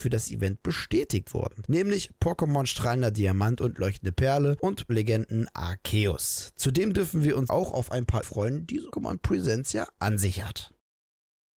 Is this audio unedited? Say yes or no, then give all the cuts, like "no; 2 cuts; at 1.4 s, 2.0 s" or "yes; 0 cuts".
no; 4 cuts; at 4.9 s, 7.5 s, 8.2 s, 8.9 s